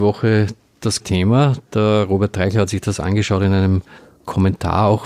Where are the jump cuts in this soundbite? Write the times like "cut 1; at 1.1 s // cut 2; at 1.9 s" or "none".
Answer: cut 1; at 1.0 s